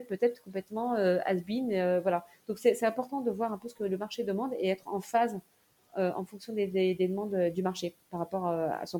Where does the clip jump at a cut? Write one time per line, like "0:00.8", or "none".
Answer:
none